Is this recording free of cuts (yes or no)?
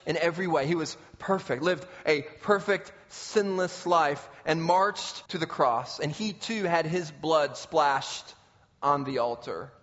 no